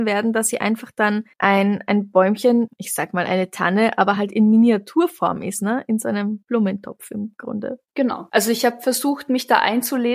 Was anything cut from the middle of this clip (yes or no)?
no